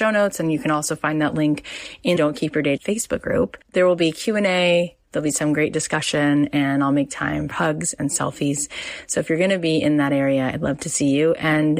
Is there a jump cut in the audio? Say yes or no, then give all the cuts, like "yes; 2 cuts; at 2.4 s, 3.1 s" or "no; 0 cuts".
yes; 3 cuts; at 2.2 s, 2.8 s, 7.5 s